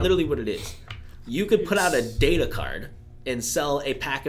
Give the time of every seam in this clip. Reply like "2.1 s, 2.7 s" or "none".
none